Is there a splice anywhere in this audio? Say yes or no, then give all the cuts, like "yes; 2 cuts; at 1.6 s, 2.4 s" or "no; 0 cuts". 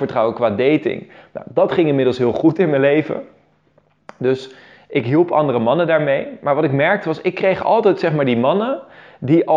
no; 0 cuts